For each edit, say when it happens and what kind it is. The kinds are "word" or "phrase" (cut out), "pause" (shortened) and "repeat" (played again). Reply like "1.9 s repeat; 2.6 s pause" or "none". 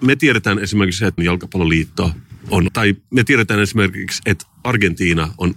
1.2 s word; 2.7 s word